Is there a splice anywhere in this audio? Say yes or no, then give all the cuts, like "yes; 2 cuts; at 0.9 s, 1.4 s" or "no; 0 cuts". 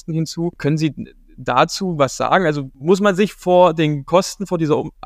no; 0 cuts